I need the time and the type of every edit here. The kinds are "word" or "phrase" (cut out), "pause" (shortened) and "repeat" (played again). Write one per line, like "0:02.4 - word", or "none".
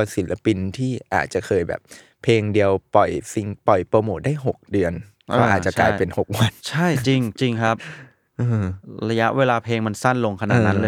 0:06.6 - pause